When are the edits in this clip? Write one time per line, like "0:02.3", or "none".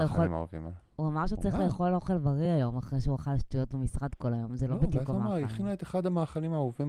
none

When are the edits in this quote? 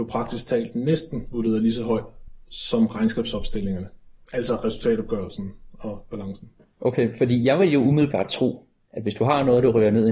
none

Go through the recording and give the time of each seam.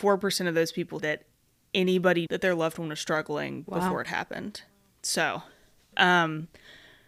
0:01.0
0:02.3
0:05.9

